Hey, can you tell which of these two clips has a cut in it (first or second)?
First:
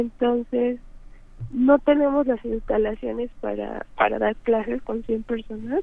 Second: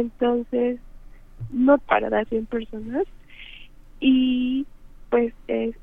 second